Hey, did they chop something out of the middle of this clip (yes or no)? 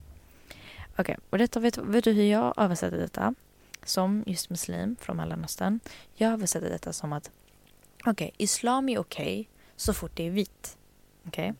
no